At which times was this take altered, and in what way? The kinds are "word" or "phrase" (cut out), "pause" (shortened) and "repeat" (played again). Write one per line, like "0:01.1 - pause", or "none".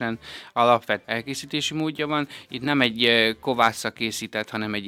0:01.0 - word